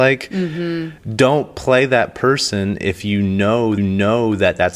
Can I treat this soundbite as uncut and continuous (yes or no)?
no